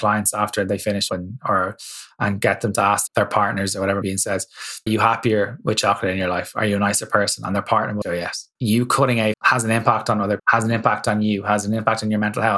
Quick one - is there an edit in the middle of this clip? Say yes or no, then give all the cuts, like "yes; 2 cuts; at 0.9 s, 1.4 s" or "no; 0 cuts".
yes; 8 cuts; at 1.1 s, 3.1 s, 4.0 s, 4.9 s, 8.0 s, 8.6 s, 9.3 s, 10.4 s